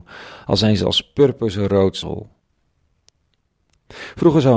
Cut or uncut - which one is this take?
cut